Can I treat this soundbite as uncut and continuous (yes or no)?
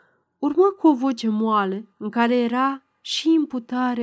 no